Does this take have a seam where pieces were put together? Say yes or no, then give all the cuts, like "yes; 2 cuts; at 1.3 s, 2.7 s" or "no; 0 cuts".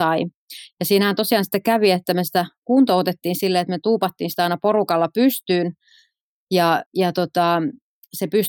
yes; 1 cut; at 6.9 s